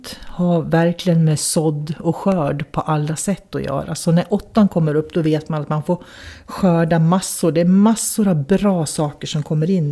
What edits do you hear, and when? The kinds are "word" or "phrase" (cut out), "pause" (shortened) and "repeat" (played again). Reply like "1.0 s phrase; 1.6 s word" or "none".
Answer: none